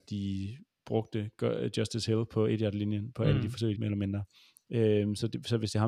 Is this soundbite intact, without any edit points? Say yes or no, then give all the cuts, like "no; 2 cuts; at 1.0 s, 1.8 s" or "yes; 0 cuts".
no; 1 cut; at 3.7 s